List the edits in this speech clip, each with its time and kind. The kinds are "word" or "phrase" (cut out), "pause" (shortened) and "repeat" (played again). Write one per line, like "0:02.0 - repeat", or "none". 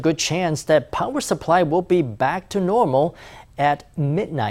none